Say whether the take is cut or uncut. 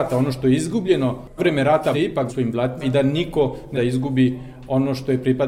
cut